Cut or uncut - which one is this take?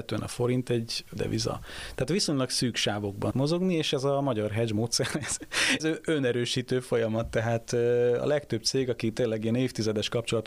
cut